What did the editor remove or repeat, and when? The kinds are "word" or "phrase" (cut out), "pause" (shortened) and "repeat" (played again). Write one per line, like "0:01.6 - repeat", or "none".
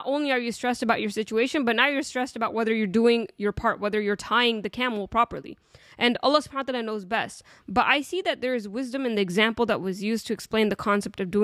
none